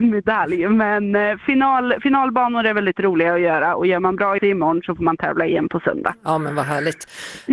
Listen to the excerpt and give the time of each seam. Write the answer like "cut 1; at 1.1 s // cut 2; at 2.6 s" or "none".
cut 1; at 4.4 s